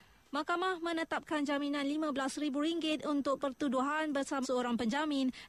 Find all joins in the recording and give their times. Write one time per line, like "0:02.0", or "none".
0:03.4
0:04.4